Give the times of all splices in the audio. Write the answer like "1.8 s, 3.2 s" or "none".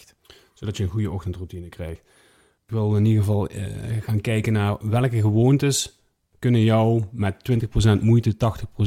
none

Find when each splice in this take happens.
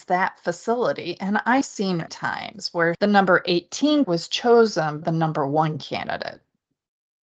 1.6 s, 2.1 s, 2.9 s, 4.0 s, 5.0 s

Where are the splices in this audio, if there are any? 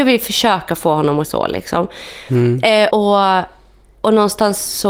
1.2 s, 2.9 s

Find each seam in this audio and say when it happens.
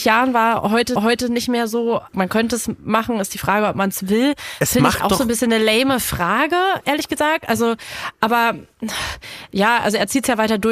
1.0 s, 2.1 s

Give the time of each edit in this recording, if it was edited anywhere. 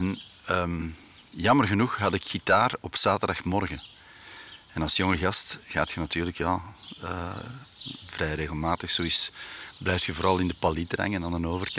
none

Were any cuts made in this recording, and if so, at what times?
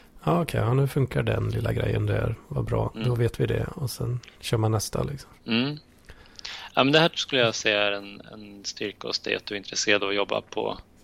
5.4 s

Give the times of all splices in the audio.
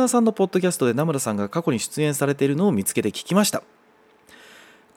none

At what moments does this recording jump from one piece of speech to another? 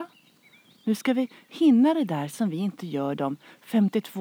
none

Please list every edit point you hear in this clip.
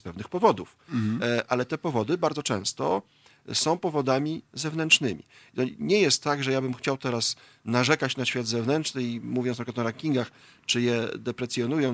none

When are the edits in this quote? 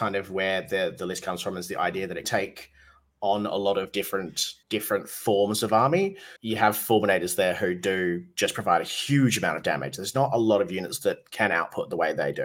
2.2 s, 4.6 s, 6.4 s

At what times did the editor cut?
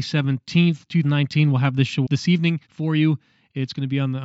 1.0 s, 2.1 s, 2.6 s

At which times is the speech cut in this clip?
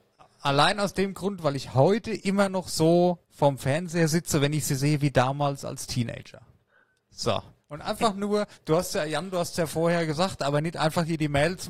3.2 s, 7.6 s, 8.5 s

